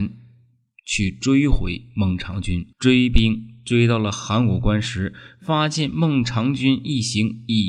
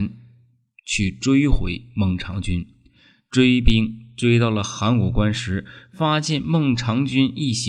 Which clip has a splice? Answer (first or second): first